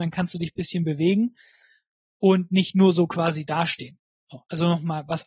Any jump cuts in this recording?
no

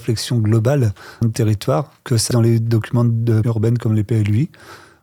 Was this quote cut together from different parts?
yes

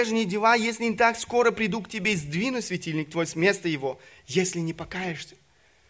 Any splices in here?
no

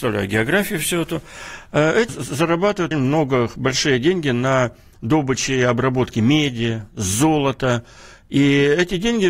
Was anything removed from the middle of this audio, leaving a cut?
yes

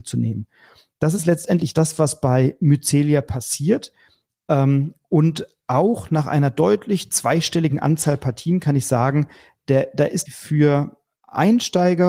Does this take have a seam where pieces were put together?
yes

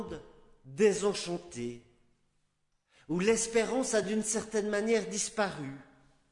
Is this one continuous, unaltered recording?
yes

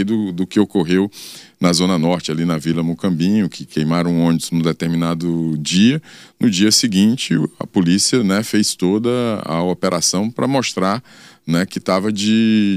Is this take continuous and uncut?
yes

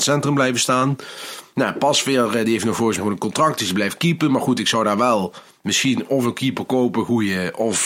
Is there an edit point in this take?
yes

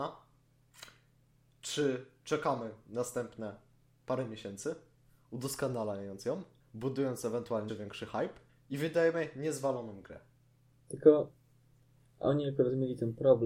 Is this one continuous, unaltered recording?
no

